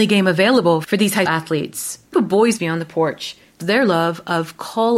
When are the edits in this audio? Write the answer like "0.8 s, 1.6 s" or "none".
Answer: 1.3 s, 2.1 s, 2.6 s, 3.6 s